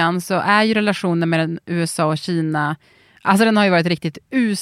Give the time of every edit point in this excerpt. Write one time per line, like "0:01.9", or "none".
none